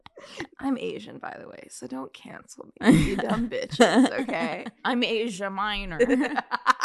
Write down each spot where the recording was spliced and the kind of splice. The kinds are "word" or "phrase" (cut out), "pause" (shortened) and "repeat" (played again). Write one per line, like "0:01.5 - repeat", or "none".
none